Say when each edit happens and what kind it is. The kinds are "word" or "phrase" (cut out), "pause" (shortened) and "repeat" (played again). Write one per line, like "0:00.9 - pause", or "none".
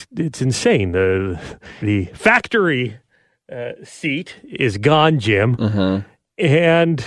0:01.8 - word